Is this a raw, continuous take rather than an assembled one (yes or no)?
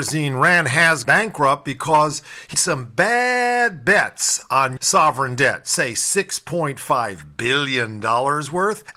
no